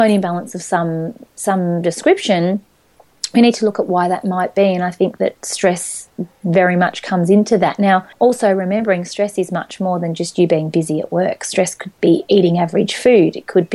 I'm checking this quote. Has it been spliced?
yes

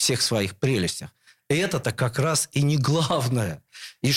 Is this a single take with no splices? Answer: yes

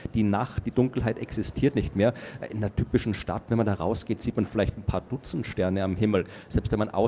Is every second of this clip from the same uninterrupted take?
yes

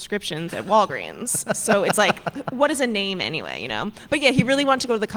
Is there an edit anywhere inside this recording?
no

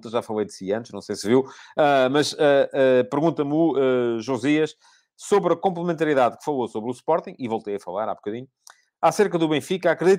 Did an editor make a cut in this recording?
no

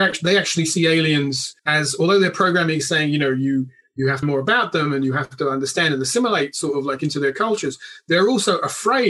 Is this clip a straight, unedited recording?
no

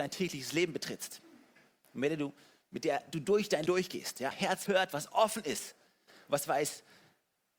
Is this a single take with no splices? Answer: no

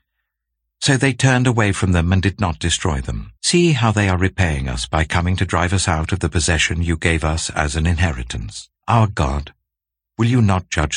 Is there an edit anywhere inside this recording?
yes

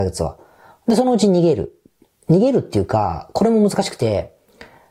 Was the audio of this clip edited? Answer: no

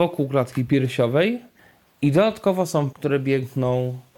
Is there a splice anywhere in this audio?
yes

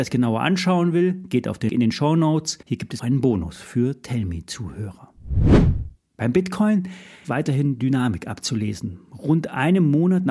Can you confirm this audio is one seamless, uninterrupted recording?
no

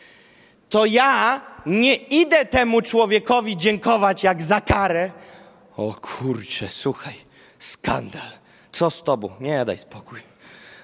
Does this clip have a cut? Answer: no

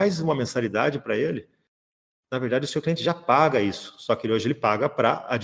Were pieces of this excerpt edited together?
no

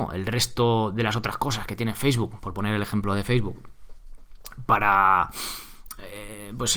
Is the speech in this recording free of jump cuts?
yes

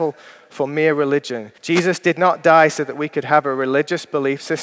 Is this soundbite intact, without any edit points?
no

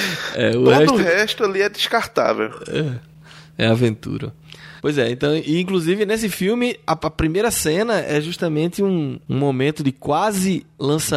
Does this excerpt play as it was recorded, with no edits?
no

